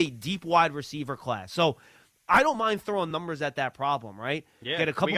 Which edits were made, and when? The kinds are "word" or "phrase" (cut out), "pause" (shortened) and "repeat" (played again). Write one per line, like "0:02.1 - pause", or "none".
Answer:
none